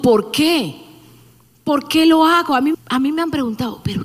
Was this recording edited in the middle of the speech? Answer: yes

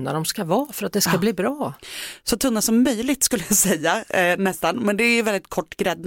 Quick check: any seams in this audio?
no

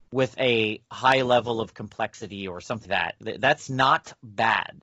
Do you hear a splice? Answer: yes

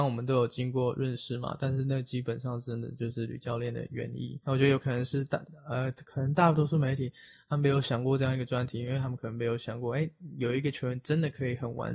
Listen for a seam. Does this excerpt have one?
yes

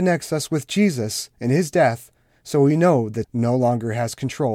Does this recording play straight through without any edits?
no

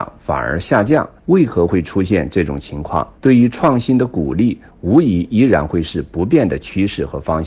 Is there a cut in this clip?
yes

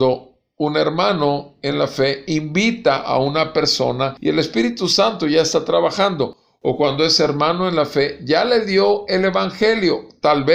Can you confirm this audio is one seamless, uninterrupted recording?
yes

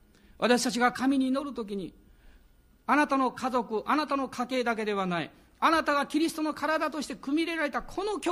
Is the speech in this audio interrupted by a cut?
no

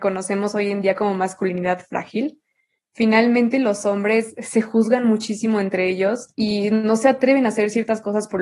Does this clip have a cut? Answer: yes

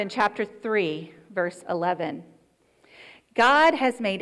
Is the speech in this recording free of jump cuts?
yes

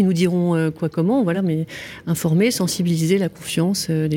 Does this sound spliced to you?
no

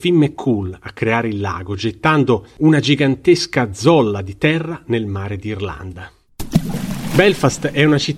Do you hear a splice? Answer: no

